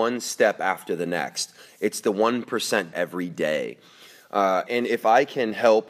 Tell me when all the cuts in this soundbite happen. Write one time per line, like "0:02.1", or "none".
0:02.9
0:04.7